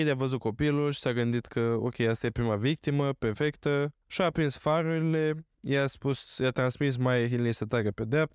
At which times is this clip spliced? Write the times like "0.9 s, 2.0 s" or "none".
5.5 s